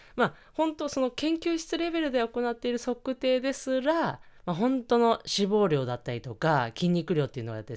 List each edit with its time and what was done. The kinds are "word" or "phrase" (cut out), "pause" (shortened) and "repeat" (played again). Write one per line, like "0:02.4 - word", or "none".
none